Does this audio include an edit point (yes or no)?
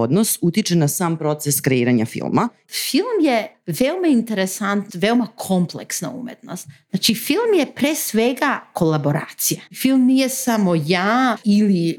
yes